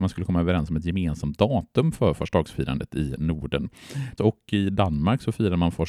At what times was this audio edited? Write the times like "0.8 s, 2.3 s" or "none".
4.2 s